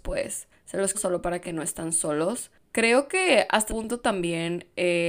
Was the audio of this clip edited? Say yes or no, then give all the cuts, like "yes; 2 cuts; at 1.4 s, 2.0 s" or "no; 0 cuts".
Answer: yes; 3 cuts; at 0.9 s, 1.4 s, 3.7 s